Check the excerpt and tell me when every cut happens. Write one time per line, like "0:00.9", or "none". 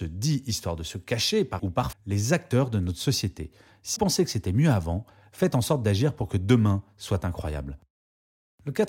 0:01.6
0:01.9
0:04.0